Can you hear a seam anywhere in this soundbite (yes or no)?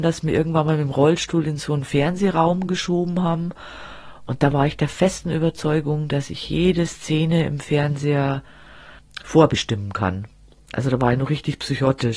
no